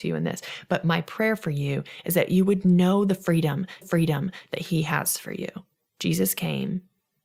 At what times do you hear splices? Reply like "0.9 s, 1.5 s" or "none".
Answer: 3.8 s, 5.8 s